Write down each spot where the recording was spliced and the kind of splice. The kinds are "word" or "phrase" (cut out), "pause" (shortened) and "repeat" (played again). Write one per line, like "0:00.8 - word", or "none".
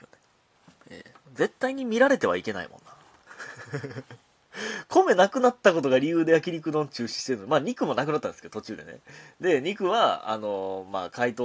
0:01.2 - pause